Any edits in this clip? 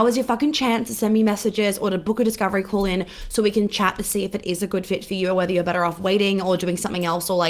no; 0 cuts

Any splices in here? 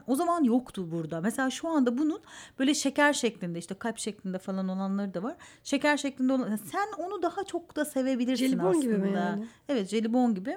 no; 0 cuts

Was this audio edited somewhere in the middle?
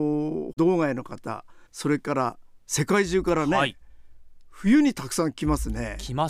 yes; 2 cuts; at 1.7 s, 2.6 s

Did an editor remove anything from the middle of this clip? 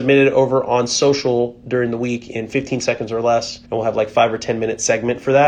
yes; 1 cut; at 3.6 s

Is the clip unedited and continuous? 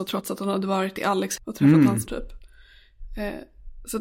no; 2 cuts; at 1.4 s, 2.1 s

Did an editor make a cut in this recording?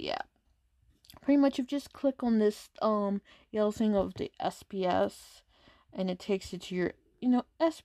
no; 0 cuts

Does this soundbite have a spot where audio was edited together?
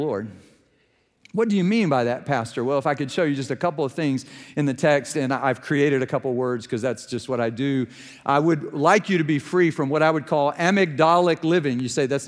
no; 0 cuts

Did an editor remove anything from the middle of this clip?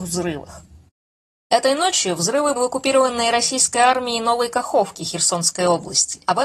yes; 1 cut; at 2.6 s

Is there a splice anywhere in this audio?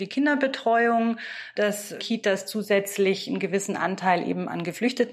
yes; 1 cut; at 2.0 s

